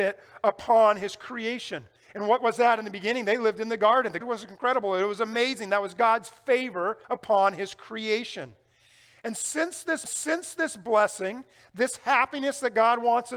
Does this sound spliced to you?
yes; 3 cuts; at 4.2 s, 7.0 s, 10.1 s

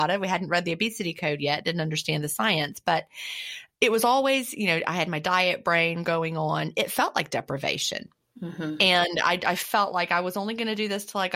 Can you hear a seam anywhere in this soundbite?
yes; 1 cut; at 3.7 s

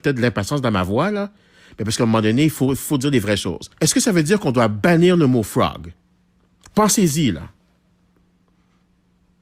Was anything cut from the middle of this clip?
yes; 1 cut; at 3.7 s

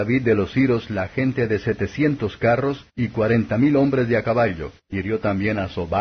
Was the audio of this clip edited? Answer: yes; 2 cuts; at 2.9 s, 4.8 s

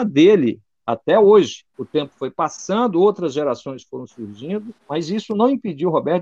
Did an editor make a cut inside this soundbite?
yes; 2 cuts; at 1.7 s, 4.8 s

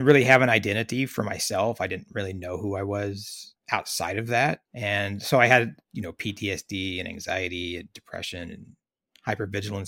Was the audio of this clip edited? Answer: yes; 1 cut; at 4.7 s

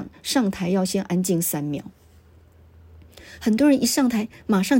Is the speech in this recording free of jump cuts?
yes; 0 cuts

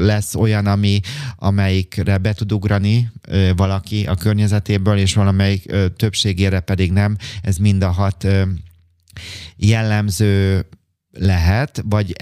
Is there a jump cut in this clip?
no; 0 cuts

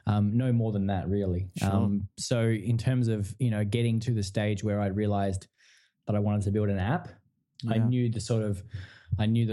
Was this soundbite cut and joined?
no; 0 cuts

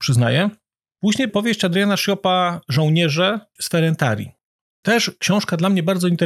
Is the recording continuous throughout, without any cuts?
no; 2 cuts; at 1.3 s, 3.6 s

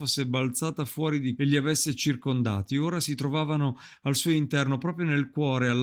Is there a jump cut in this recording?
yes; 1 cut; at 1.4 s

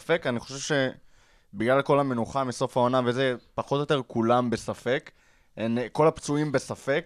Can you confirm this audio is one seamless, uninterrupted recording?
yes; 0 cuts

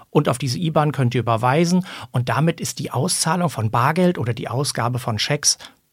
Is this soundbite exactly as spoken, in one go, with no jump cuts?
yes; 0 cuts

